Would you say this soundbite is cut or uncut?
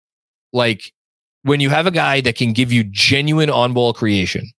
uncut